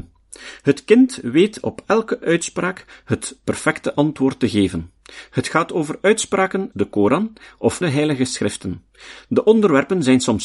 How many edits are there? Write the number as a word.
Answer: two